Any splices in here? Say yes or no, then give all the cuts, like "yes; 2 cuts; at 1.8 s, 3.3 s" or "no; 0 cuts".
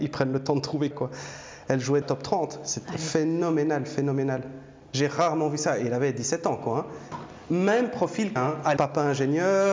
yes; 4 cuts; at 0.9 s, 2.0 s, 8.4 s, 8.8 s